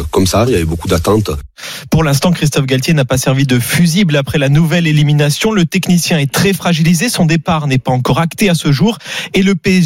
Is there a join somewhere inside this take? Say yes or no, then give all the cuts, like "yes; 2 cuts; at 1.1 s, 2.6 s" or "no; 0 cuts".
no; 0 cuts